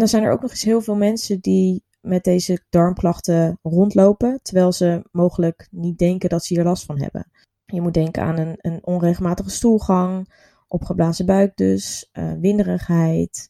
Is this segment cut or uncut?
uncut